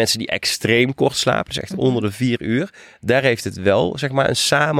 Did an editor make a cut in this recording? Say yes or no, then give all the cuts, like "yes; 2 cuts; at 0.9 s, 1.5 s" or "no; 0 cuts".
no; 0 cuts